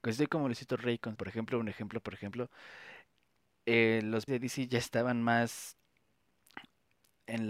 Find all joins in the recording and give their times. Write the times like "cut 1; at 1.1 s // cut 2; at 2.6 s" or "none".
cut 1; at 1.1 s // cut 2; at 4.3 s